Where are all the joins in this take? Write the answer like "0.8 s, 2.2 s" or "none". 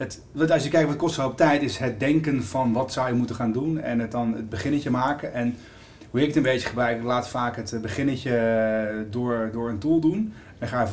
none